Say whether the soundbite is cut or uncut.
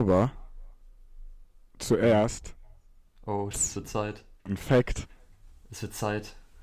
cut